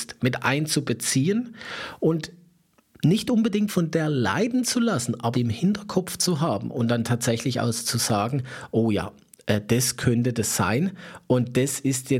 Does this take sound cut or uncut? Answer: cut